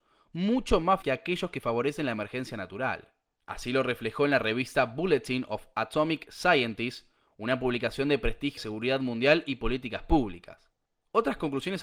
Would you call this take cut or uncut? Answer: cut